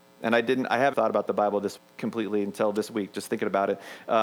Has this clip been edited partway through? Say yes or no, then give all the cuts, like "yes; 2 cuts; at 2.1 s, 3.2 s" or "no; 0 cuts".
yes; 2 cuts; at 0.9 s, 1.8 s